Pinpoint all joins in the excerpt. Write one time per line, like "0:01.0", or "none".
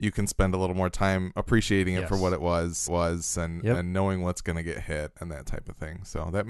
0:02.9
0:05.1